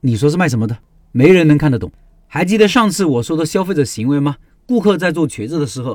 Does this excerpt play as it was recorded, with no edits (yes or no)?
yes